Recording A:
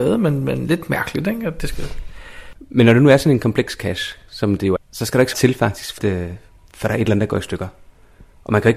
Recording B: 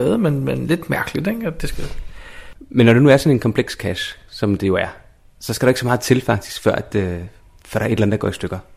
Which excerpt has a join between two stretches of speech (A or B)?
A